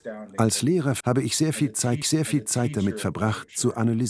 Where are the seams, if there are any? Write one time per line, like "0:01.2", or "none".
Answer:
0:01.0
0:02.0